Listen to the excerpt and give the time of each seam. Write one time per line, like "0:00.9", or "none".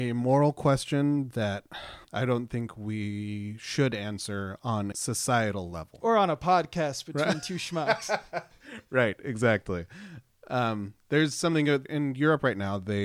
0:02.0
0:04.9
0:11.8